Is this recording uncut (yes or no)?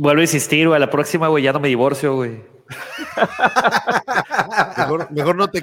yes